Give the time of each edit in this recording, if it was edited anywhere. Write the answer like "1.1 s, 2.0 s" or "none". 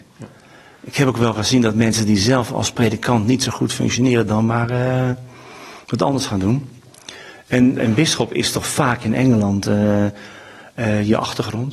none